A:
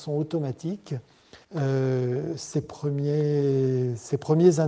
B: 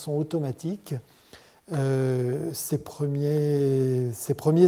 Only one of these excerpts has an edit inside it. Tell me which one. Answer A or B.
A